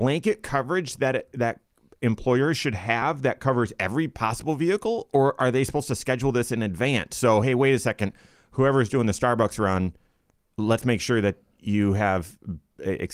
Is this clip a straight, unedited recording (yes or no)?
yes